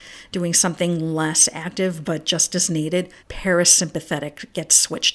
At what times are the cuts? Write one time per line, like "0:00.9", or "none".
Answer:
0:03.2